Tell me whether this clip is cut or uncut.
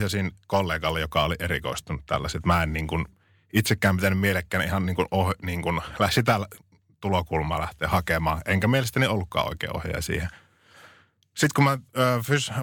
uncut